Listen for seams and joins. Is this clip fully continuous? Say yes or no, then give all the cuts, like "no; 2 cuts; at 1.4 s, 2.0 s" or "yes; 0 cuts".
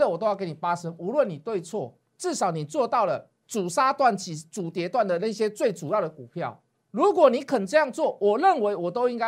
no; 2 cuts; at 3.4 s, 6.7 s